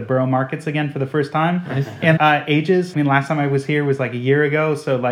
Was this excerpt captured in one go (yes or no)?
no